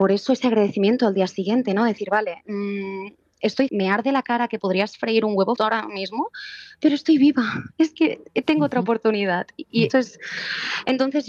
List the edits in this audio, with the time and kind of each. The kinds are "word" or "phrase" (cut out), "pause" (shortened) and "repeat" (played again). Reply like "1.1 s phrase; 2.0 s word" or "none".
3.7 s word; 5.6 s word; 9.9 s word